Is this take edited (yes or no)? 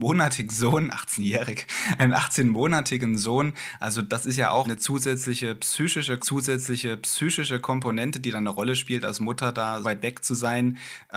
yes